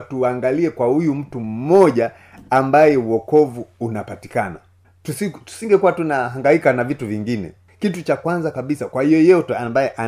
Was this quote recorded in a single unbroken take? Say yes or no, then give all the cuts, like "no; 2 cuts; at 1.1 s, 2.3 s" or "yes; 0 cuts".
yes; 0 cuts